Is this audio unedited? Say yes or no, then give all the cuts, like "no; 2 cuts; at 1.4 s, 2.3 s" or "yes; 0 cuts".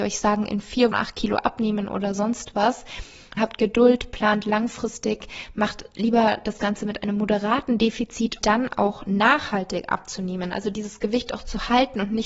no; 3 cuts; at 0.9 s, 3.4 s, 8.4 s